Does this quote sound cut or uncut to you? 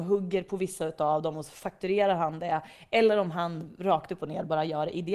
uncut